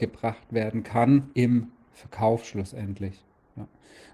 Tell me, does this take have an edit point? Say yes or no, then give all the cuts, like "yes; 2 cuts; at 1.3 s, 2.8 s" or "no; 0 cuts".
yes; 1 cut; at 1.3 s